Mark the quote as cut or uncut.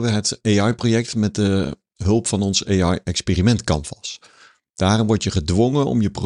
uncut